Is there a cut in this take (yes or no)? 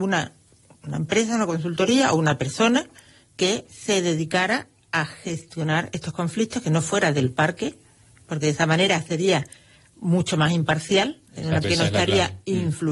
yes